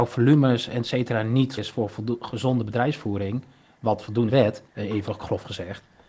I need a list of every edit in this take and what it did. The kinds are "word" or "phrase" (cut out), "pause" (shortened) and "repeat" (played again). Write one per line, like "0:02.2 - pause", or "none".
0:01.6 - word
0:04.3 - phrase
0:04.7 - pause